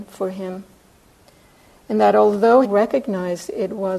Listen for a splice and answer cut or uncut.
cut